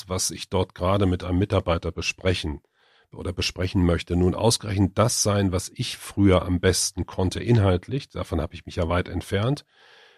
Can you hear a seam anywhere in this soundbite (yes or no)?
no